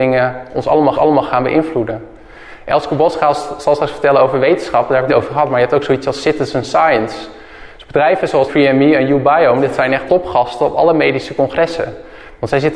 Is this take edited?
yes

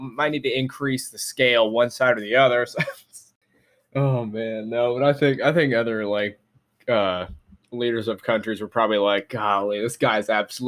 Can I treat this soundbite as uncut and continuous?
yes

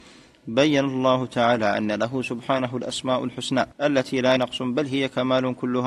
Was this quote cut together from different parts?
yes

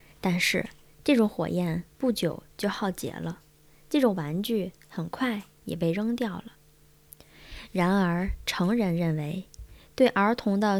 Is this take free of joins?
yes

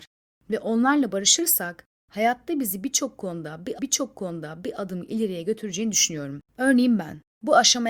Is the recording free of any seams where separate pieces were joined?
no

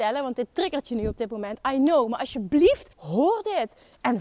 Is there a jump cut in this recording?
yes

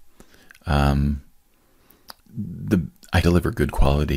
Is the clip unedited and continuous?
no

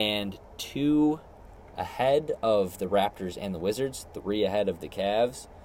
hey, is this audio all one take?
yes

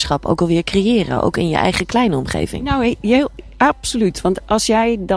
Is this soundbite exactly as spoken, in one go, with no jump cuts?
yes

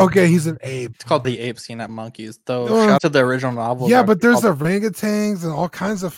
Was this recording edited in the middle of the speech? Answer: yes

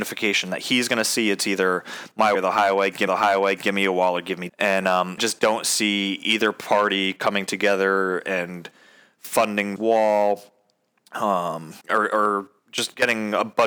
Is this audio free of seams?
no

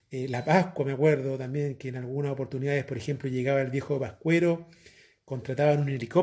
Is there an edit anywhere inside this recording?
no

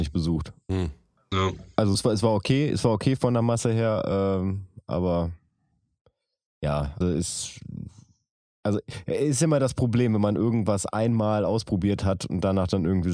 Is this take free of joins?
no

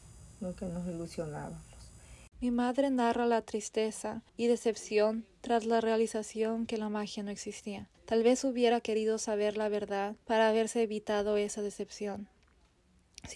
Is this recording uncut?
no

